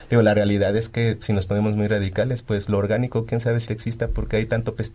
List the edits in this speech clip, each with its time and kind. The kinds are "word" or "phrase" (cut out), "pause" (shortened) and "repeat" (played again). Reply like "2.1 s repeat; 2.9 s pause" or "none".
3.7 s word